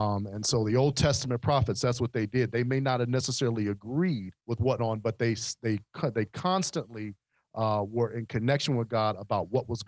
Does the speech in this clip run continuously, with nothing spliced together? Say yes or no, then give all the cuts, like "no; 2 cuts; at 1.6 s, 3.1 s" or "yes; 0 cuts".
no; 2 cuts; at 4.4 s, 4.8 s